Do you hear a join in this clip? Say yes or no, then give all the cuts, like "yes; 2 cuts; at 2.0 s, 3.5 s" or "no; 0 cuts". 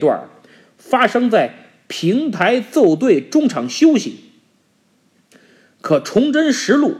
no; 0 cuts